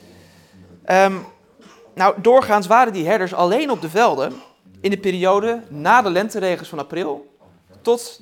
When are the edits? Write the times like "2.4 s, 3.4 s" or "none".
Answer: none